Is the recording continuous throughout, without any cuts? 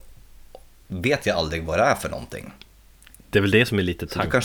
yes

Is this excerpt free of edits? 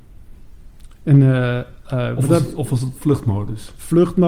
yes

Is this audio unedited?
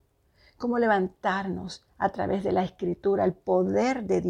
yes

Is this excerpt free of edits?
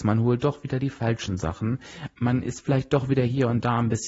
no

